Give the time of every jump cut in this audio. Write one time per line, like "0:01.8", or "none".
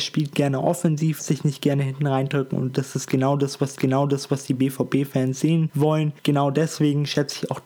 0:01.2
0:03.8